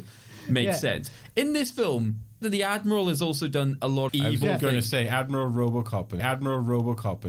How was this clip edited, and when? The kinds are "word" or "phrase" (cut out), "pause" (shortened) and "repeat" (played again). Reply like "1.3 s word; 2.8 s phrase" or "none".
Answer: 2.4 s phrase; 4.1 s word; 6.2 s repeat

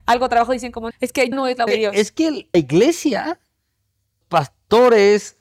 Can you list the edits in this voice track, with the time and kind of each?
0.9 s word; 1.3 s word; 1.7 s word; 2.5 s word; 4.2 s word

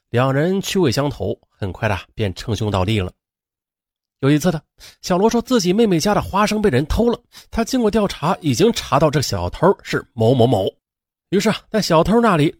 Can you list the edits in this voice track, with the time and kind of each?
none

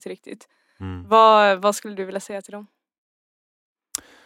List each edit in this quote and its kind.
none

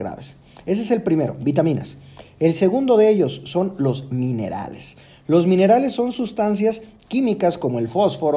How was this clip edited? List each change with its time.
none

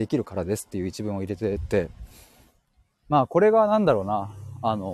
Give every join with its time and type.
none

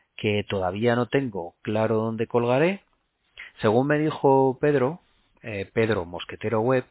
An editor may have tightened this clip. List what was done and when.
none

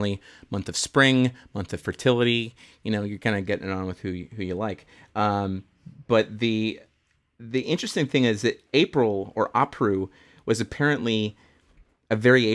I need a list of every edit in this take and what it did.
8.7 s pause

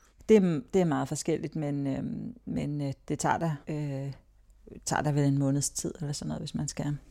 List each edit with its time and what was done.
3.6 s pause

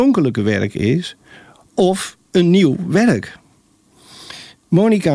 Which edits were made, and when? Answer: none

